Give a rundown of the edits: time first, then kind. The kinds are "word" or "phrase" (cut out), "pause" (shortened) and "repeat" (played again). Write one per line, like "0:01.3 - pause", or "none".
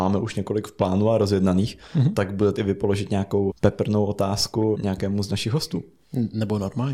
0:02.6 - word
0:03.5 - word
0:04.7 - word